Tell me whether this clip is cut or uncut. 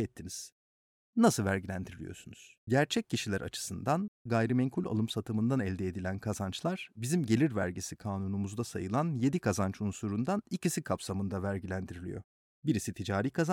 cut